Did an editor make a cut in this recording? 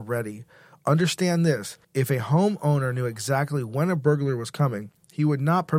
yes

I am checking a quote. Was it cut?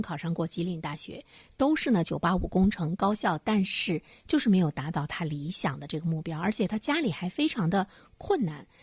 no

